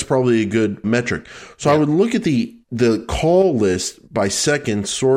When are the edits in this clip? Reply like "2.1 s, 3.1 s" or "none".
2.6 s, 4.0 s